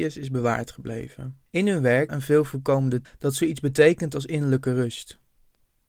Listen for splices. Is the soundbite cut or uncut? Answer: cut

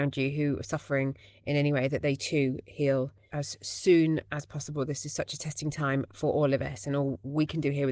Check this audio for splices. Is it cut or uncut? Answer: uncut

